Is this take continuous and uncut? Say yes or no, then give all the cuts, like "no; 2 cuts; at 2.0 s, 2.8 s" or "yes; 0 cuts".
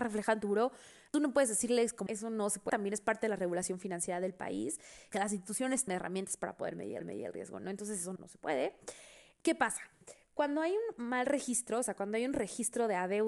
no; 5 cuts; at 2.1 s, 2.7 s, 5.9 s, 7.0 s, 8.2 s